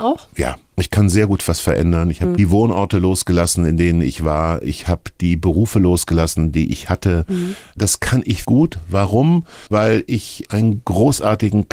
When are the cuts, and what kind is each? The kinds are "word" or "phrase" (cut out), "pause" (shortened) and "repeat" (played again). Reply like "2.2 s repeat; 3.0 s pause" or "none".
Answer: 8.4 s word; 9.7 s pause